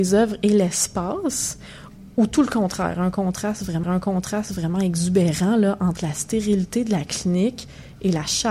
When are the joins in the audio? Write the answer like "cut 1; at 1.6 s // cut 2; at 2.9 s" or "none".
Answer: cut 1; at 3.8 s